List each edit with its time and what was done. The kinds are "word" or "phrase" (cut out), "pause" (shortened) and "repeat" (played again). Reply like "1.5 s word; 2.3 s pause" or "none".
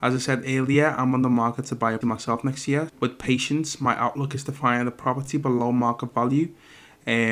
2.0 s word; 2.9 s word